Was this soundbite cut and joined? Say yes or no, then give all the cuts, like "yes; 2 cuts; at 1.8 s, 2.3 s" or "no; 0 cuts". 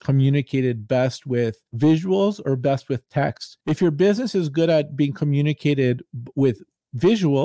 yes; 2 cuts; at 1.7 s, 3.6 s